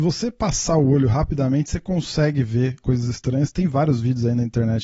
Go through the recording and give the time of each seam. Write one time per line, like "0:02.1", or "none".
0:02.8